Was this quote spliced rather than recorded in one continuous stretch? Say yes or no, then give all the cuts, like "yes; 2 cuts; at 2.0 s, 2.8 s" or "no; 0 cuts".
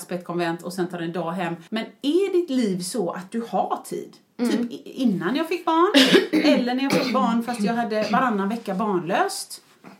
yes; 1 cut; at 1.7 s